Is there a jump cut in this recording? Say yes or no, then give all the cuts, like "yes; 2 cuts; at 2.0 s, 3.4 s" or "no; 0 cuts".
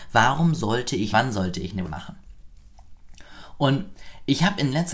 yes; 2 cuts; at 1.1 s, 1.8 s